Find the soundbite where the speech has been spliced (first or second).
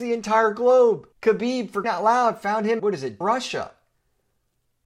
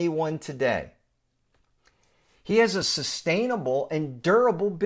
first